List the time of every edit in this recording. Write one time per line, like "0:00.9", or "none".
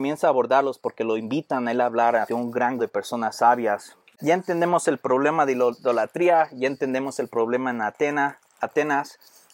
0:02.3
0:02.8

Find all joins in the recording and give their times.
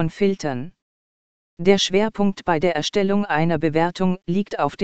none

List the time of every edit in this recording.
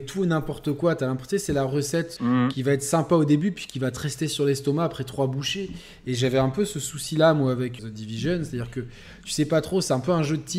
0:02.2
0:07.8

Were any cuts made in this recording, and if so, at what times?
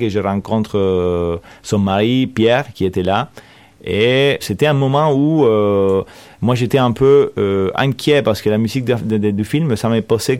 0:04.4

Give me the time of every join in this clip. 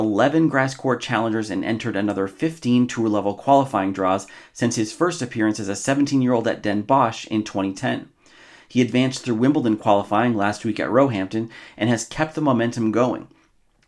none

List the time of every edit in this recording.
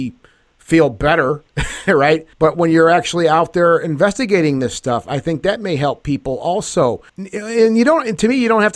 0:02.3
0:07.1

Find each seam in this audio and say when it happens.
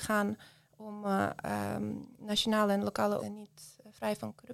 0:02.1
0:03.2

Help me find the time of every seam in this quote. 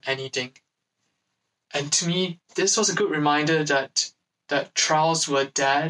0:02.5

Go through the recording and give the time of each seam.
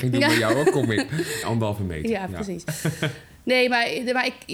0:01.4

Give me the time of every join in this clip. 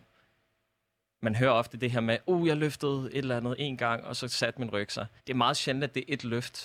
0:05.2

